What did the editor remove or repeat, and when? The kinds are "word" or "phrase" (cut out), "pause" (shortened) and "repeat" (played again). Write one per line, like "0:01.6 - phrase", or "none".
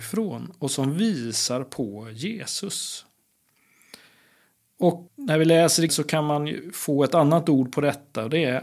0:05.1 - word
0:05.9 - word